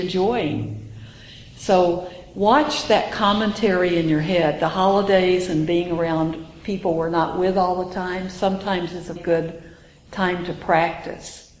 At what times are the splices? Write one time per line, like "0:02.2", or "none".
0:09.2